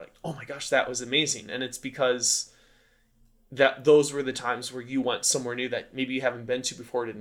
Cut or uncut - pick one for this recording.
uncut